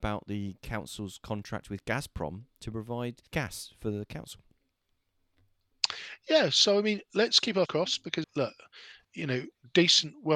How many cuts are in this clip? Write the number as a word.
four